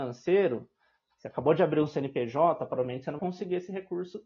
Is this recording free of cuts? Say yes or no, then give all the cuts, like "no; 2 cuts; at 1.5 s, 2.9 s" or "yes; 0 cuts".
no; 1 cut; at 3.2 s